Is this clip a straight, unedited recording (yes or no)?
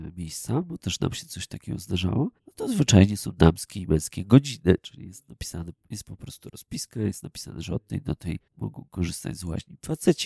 no